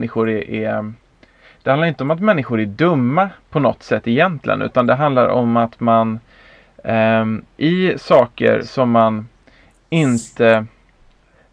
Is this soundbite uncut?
yes; 0 cuts

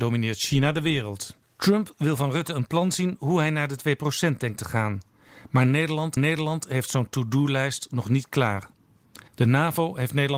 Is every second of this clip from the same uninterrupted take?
no; 3 cuts; at 1.4 s, 6.2 s, 9.3 s

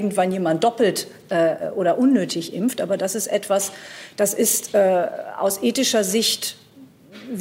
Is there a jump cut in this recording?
no; 0 cuts

